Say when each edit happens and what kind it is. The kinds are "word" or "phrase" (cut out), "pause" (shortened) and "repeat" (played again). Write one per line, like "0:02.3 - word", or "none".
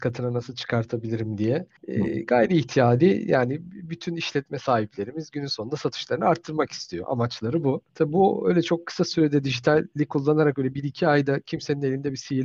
0:01.8 - pause
0:07.9 - pause